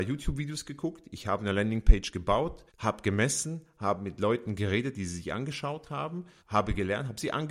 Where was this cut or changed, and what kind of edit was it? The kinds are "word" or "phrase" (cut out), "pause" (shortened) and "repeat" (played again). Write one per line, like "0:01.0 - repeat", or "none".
0:02.7 - pause
0:06.4 - pause